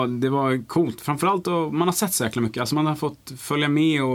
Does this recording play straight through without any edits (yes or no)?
yes